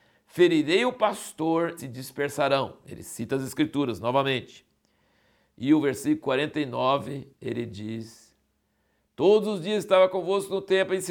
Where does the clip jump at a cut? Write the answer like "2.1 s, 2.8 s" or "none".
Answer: 1.8 s, 7.3 s

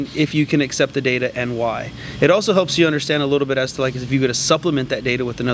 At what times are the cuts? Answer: none

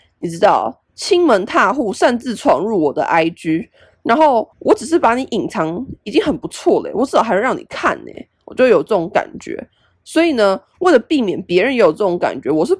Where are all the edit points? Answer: 4.5 s

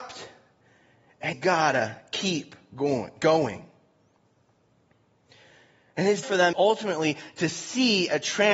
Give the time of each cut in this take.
1.3 s, 6.2 s, 6.5 s

